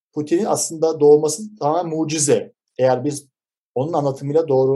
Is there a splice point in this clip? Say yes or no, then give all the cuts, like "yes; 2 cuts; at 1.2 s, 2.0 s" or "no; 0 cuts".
no; 0 cuts